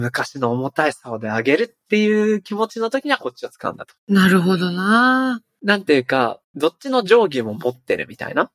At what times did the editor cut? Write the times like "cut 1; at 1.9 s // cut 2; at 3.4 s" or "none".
cut 1; at 4.0 s // cut 2; at 6.4 s